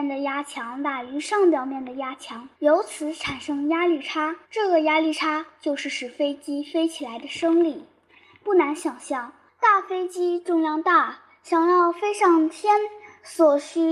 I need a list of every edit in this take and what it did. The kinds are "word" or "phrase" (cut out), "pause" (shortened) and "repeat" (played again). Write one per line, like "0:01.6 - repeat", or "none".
0:02.5 - pause
0:04.4 - pause
0:09.5 - pause